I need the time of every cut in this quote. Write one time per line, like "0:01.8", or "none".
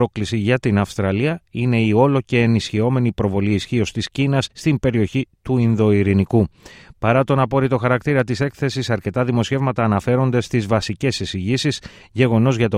0:04.5